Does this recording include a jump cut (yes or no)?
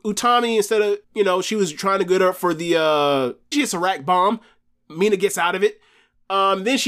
yes